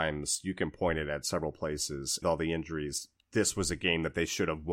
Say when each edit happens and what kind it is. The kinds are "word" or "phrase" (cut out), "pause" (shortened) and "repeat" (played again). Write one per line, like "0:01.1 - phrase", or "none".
0:02.2 - phrase